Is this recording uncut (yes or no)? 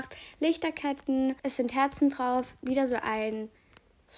no